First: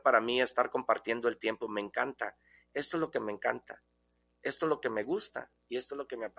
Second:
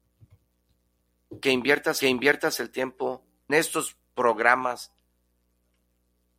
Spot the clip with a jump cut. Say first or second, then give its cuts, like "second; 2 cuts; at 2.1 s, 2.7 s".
second; 2 cuts; at 2.0 s, 3.5 s